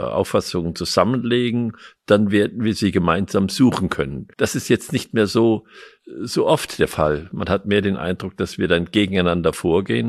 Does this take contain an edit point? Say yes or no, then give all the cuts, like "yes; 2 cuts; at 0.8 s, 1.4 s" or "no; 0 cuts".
yes; 1 cut; at 4.3 s